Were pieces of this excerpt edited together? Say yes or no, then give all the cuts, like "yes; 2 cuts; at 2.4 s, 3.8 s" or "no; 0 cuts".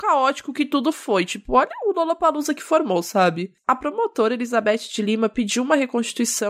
no; 0 cuts